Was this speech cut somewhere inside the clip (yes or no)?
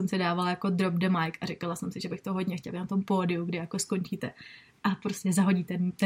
no